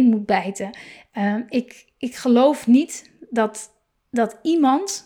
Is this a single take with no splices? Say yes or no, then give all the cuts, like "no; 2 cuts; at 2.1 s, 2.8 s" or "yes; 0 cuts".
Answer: yes; 0 cuts